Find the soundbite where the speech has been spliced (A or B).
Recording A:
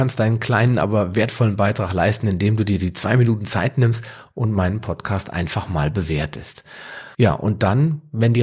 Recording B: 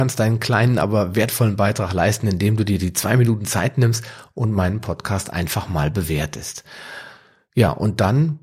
A